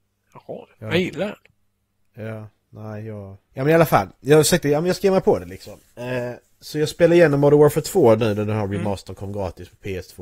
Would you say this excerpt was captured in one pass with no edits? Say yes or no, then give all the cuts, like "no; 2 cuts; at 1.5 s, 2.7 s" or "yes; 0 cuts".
no; 2 cuts; at 3.5 s, 5.9 s